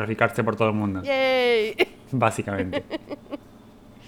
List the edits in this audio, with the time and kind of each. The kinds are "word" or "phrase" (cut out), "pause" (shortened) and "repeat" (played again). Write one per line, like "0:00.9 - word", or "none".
none